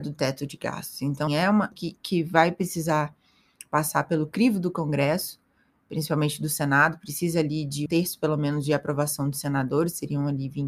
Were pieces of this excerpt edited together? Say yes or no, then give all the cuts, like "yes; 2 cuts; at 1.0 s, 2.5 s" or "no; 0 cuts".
yes; 3 cuts; at 1.3 s, 1.7 s, 7.9 s